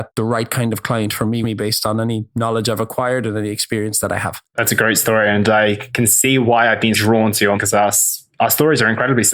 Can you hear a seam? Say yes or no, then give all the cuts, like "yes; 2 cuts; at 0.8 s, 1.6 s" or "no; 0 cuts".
yes; 4 cuts; at 1.4 s, 4.5 s, 6.9 s, 7.5 s